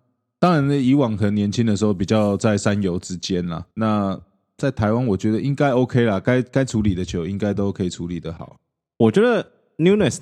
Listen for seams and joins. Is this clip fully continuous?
no; 1 cut; at 3.7 s

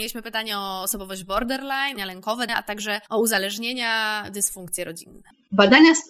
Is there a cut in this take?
yes; 3 cuts; at 2.0 s, 2.5 s, 3.1 s

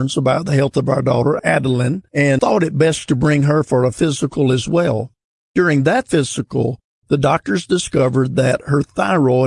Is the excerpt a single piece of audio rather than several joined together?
yes; 0 cuts

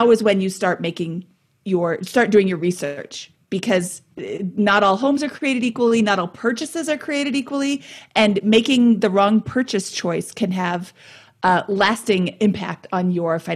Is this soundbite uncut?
yes; 0 cuts

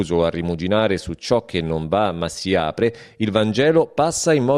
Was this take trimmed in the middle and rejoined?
no; 0 cuts

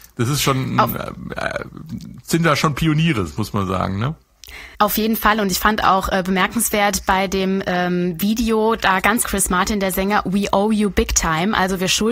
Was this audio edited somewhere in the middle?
yes; 2 cuts; at 4.7 s, 9.2 s

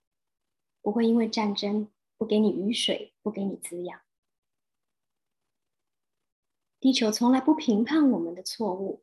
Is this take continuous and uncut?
yes; 0 cuts

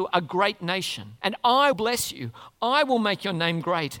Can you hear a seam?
yes; 2 cuts; at 1.2 s, 1.7 s

